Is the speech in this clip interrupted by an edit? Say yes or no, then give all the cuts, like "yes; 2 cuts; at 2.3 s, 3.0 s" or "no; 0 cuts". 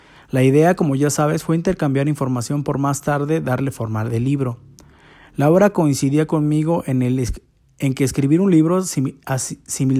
no; 0 cuts